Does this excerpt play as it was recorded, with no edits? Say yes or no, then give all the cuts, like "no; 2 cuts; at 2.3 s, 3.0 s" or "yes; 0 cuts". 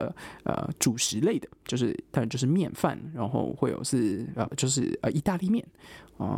no; 1 cut; at 4.5 s